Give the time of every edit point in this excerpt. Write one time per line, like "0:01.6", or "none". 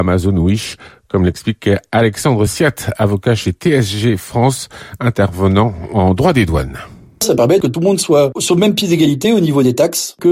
none